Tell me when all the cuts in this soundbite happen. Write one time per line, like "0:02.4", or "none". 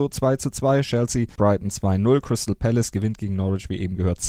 0:01.4